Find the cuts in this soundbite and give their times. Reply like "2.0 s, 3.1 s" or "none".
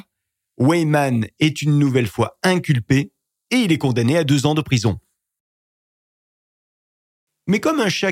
none